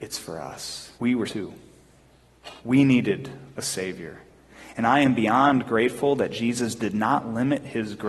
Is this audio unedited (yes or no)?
no